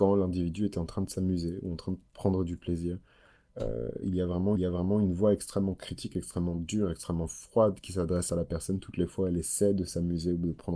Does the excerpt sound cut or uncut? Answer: cut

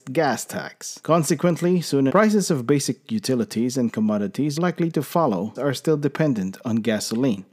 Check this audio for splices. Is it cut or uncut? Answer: cut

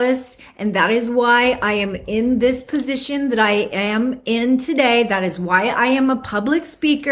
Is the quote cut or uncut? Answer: uncut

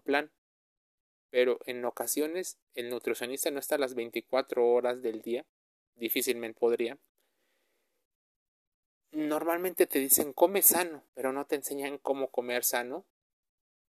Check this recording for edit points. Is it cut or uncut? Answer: cut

